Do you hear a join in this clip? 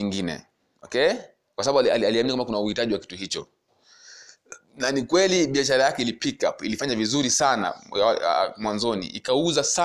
no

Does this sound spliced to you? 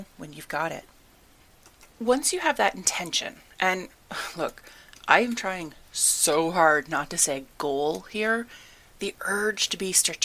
yes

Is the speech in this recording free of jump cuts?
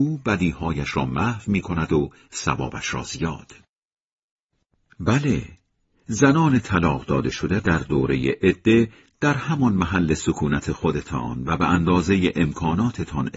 no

